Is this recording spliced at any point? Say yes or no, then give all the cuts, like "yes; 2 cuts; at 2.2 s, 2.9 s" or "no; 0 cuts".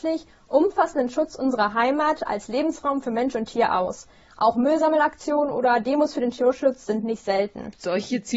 no; 0 cuts